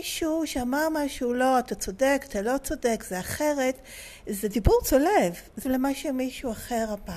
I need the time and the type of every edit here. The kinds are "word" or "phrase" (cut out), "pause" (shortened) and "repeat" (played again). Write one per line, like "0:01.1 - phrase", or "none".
0:05.6 - word